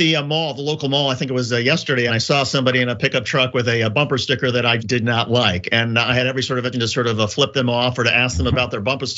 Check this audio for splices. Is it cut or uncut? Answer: cut